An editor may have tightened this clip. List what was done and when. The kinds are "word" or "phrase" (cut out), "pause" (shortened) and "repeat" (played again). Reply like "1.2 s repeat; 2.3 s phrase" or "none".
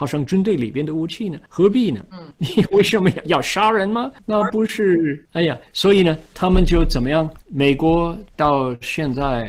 7.4 s pause